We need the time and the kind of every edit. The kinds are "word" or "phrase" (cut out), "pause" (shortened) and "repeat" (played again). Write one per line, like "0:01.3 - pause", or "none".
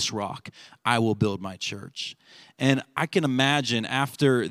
none